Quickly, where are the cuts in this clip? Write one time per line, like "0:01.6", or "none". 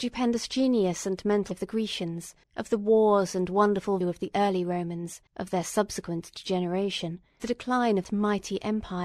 0:01.5
0:02.4
0:04.0
0:05.3
0:07.4
0:08.0

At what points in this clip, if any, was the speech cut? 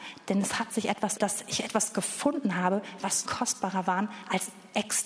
0:01.2
0:03.2

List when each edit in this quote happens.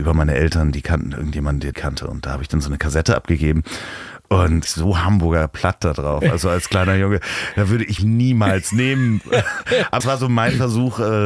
0:01.7
0:04.7
0:08.0
0:10.0

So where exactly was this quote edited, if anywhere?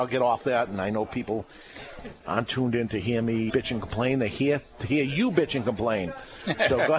0:03.5

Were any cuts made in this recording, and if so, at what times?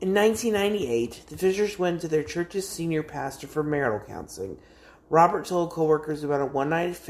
none

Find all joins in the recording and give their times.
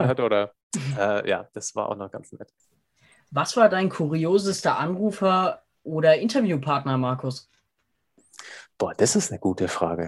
none

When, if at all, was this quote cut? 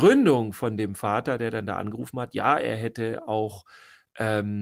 none

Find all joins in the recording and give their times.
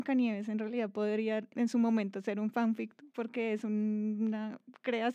0:01.5

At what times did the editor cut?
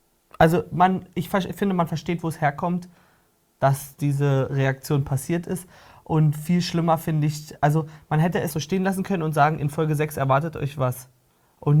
0:08.5

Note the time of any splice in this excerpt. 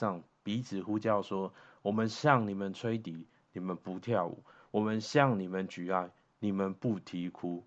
none

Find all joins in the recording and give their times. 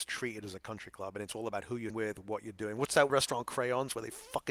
0:01.9
0:03.1

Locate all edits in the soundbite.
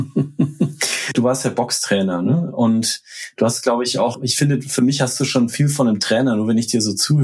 0:04.1

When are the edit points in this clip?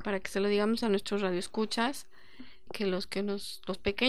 0:02.7

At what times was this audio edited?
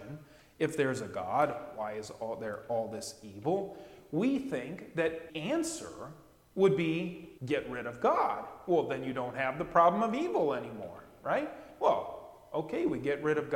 0:05.3
0:07.4

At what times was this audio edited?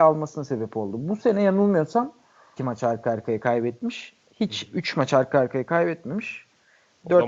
0:02.6

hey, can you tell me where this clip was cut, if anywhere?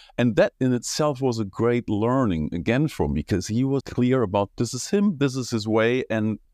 0:03.8

